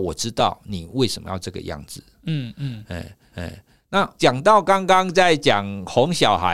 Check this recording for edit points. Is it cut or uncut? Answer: cut